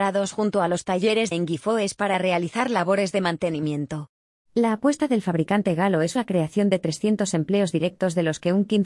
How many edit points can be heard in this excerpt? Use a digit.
2